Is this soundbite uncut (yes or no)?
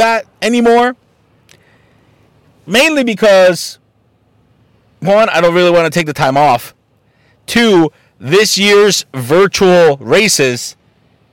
yes